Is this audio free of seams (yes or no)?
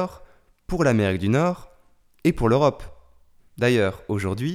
yes